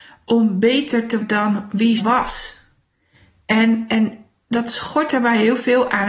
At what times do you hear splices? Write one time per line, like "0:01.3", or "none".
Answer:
0:01.2
0:02.0